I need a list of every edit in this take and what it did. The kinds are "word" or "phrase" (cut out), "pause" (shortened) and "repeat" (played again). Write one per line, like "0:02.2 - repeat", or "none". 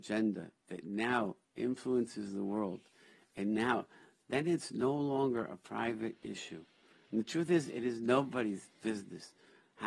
none